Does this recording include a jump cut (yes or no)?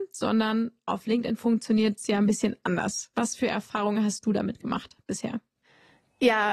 no